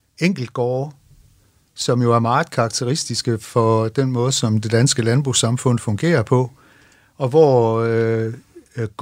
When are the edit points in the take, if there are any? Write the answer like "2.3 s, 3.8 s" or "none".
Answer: none